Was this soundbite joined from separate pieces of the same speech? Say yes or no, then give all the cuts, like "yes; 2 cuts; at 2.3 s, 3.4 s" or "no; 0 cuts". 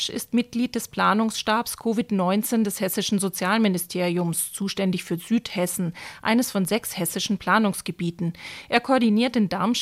no; 0 cuts